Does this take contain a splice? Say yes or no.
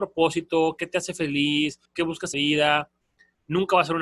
yes